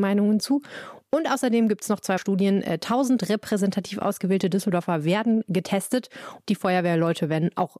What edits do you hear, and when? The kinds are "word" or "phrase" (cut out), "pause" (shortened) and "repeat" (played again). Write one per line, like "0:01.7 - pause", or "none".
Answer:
0:02.2 - word
0:06.5 - word